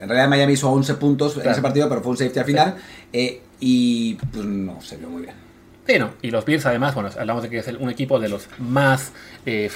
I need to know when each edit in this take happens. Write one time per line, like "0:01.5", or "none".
none